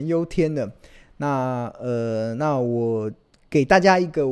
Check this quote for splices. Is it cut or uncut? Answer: uncut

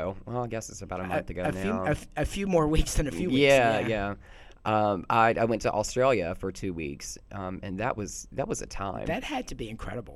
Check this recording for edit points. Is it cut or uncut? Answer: uncut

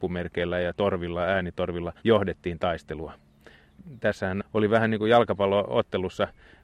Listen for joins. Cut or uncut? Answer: cut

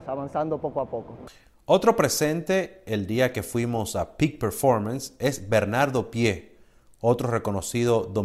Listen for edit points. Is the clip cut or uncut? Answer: uncut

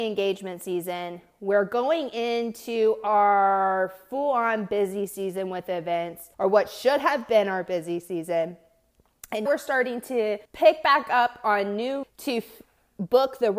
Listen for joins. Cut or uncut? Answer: cut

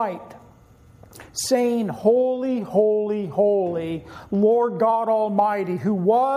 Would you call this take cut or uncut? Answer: uncut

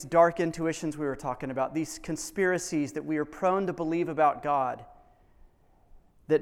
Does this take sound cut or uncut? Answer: uncut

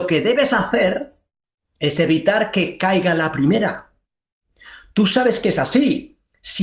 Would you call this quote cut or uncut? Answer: uncut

